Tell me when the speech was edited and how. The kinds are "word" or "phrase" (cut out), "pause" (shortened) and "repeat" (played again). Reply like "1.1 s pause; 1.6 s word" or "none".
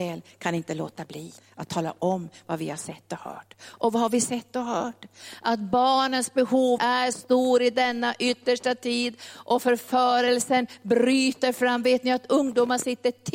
1.4 s pause; 6.8 s phrase; 7.1 s word